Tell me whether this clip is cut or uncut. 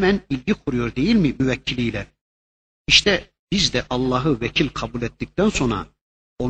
cut